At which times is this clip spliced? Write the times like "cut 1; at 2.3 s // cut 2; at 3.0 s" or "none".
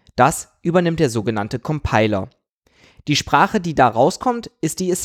none